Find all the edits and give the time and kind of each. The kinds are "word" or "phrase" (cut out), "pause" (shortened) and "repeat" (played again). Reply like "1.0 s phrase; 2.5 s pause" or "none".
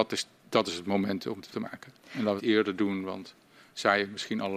1.5 s word; 2.4 s phrase